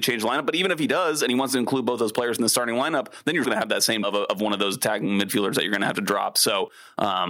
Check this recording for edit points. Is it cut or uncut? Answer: cut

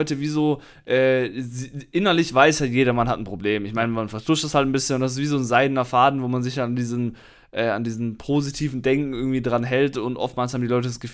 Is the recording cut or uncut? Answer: uncut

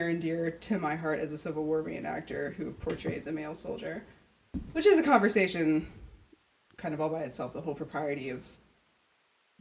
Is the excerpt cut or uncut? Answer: uncut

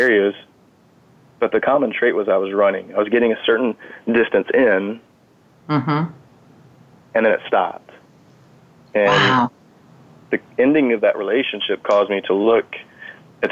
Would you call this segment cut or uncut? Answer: uncut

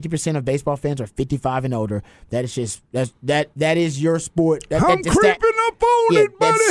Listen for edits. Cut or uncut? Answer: uncut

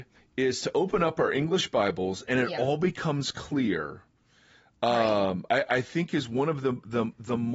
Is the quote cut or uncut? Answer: uncut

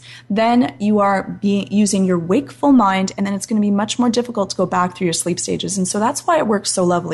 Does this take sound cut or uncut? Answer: uncut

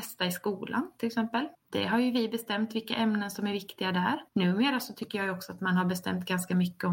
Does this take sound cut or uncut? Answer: cut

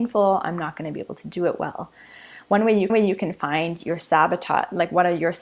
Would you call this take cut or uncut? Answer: cut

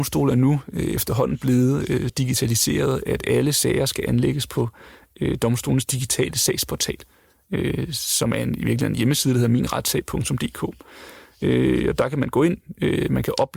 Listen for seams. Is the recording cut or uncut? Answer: cut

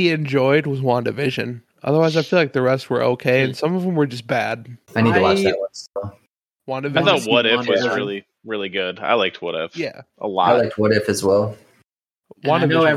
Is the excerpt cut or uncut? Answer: cut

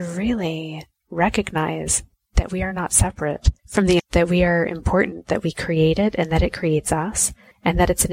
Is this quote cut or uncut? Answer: cut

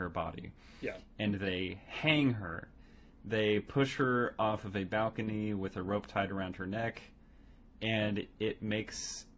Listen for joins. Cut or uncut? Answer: uncut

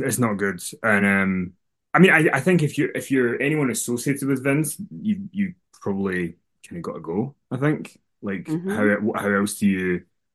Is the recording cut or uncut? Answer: uncut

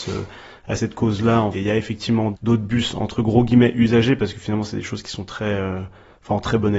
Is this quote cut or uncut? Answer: cut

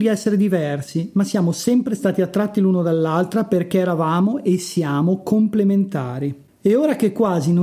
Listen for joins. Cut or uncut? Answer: uncut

